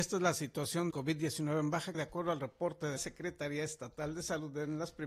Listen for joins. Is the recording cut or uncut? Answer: cut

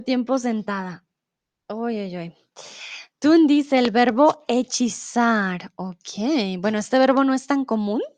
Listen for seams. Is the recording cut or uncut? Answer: uncut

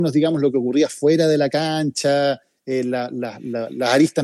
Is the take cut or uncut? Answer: uncut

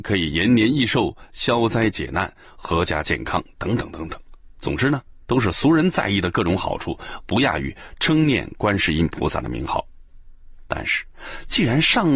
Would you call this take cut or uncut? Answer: uncut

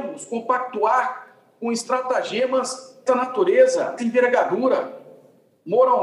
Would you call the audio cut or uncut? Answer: cut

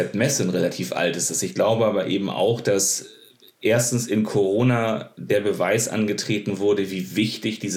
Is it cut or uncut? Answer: uncut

